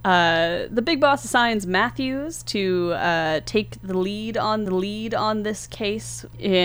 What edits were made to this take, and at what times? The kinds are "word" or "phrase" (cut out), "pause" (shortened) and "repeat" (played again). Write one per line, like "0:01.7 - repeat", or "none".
0:04.7 - repeat